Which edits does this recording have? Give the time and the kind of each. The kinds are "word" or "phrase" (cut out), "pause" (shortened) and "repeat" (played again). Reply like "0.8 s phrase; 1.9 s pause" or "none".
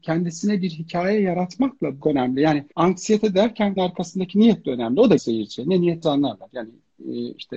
2.0 s phrase; 2.7 s pause; 3.8 s word; 5.2 s word; 6.0 s word